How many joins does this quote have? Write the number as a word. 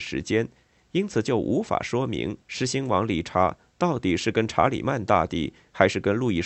one